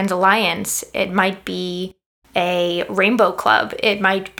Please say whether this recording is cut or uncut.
uncut